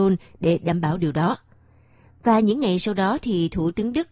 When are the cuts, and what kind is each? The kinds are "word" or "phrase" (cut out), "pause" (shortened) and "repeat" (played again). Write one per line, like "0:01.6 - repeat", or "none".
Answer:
none